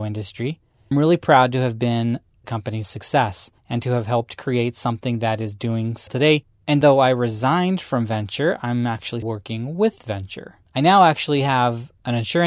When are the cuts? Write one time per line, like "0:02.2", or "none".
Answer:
0:00.9
0:02.4
0:03.6
0:06.1
0:06.8
0:09.2
0:10.7